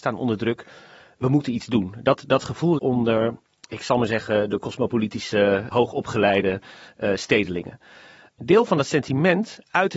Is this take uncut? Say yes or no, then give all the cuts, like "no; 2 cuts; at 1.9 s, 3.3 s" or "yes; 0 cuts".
no; 2 cuts; at 2.8 s, 5.7 s